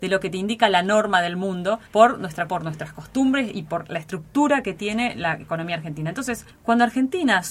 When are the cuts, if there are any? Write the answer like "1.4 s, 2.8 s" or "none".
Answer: 1.9 s, 2.5 s, 6.5 s